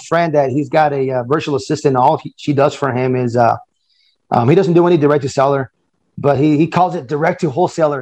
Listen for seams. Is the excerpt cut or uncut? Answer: uncut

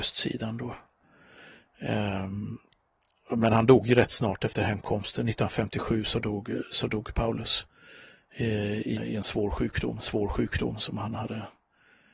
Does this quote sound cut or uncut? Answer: cut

